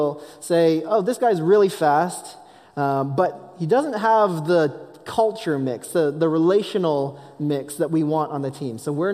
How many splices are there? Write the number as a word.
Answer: zero